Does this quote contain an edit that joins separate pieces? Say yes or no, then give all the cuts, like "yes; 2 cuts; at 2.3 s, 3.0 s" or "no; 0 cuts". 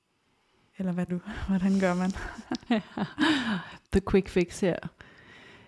yes; 2 cuts; at 1.1 s, 3.8 s